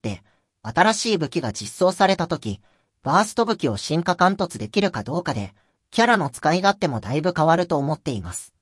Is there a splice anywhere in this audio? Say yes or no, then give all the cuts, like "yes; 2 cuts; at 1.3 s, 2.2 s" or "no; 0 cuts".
no; 0 cuts